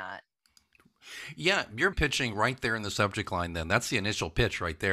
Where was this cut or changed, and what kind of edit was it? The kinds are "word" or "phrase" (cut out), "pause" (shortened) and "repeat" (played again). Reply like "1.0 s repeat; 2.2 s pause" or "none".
1.9 s word